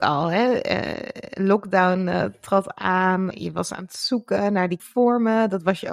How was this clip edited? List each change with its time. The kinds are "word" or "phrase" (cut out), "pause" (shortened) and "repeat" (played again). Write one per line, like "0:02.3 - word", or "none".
0:03.3 - word
0:04.8 - word